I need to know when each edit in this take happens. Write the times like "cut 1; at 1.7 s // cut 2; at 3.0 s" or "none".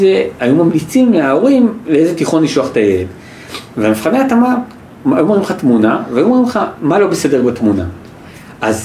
none